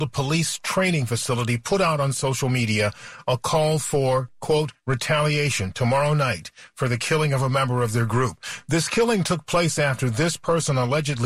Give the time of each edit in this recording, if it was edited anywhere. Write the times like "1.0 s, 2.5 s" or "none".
none